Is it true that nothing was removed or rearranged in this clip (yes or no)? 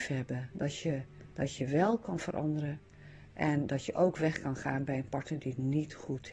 yes